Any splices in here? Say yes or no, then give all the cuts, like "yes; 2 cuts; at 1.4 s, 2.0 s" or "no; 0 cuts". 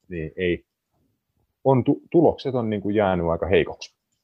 no; 0 cuts